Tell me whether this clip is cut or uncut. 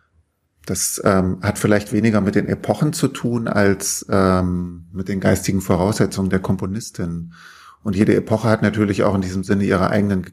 uncut